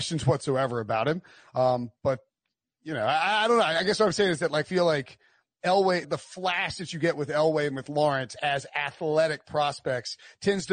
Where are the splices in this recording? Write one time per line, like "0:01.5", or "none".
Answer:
0:04.6
0:06.0